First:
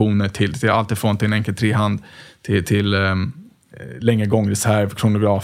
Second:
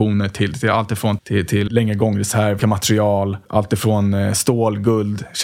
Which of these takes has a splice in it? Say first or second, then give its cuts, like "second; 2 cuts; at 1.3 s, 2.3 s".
second; 4 cuts; at 1.2 s, 1.7 s, 2.6 s, 3.4 s